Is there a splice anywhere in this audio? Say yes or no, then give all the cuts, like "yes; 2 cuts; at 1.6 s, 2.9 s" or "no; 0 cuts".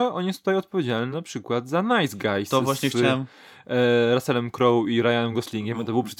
no; 0 cuts